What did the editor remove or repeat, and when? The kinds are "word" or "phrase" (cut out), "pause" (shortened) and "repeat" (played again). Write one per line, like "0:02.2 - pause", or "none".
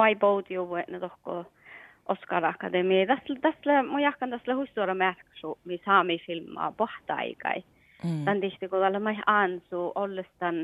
none